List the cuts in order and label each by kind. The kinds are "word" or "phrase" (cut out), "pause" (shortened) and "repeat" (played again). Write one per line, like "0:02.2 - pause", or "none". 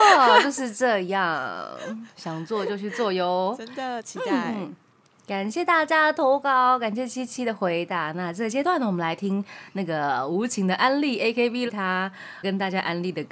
0:11.7 - phrase